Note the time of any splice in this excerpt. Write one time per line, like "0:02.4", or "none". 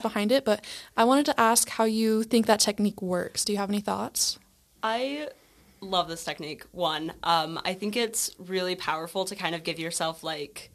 none